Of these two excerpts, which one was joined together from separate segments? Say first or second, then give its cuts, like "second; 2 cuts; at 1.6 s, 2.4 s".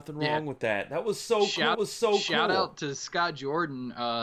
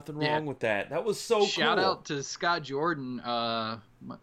first; 1 cut; at 1.7 s